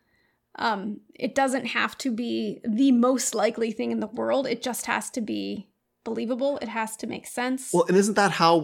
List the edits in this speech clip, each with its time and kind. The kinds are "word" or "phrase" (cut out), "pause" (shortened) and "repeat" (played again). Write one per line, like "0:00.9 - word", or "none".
none